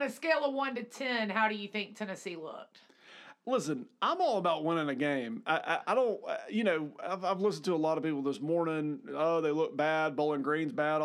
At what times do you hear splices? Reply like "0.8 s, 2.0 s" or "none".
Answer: none